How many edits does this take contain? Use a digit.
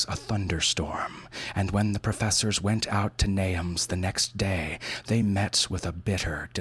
0